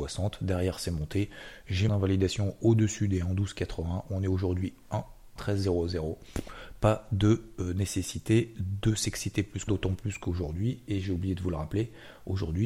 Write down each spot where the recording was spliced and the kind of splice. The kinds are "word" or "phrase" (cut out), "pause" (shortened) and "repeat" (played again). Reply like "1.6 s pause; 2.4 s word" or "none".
1.9 s word; 5.4 s word; 9.7 s word